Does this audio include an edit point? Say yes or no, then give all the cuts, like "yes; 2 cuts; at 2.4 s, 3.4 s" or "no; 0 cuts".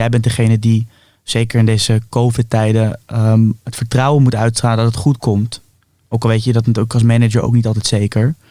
no; 0 cuts